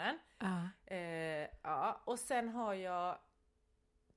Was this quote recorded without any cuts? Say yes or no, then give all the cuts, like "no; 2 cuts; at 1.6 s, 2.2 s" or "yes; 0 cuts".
yes; 0 cuts